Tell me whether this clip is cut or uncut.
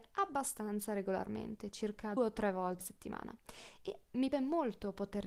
cut